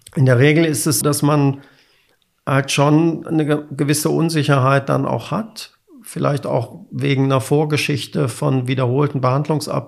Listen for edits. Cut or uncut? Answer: cut